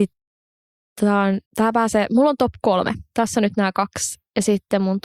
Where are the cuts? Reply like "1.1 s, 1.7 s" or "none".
1.5 s